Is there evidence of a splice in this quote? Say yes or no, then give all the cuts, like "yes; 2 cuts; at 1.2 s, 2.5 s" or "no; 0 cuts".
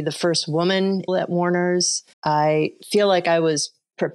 yes; 2 cuts; at 1.1 s, 2.1 s